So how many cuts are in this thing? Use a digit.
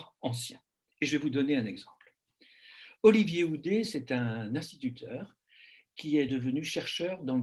0